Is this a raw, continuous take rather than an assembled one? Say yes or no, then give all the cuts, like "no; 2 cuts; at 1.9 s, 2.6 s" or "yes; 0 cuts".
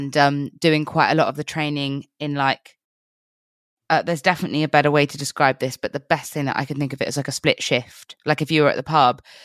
yes; 0 cuts